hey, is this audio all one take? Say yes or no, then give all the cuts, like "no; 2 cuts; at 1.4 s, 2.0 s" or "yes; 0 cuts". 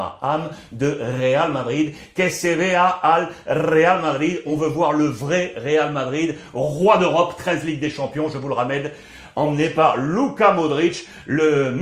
yes; 0 cuts